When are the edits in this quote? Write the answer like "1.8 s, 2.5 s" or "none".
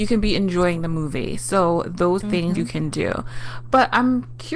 2.2 s, 2.6 s